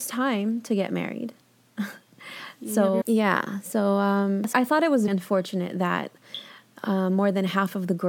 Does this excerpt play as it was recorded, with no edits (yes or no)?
no